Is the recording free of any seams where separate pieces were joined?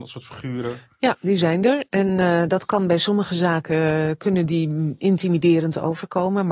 yes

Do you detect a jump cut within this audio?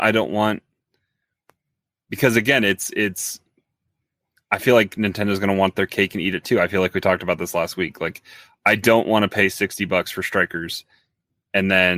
no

